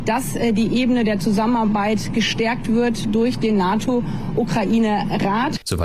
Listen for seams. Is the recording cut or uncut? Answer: uncut